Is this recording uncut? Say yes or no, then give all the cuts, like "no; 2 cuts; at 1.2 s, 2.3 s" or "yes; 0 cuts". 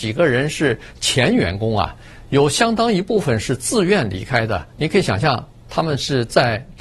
no; 1 cut; at 4.7 s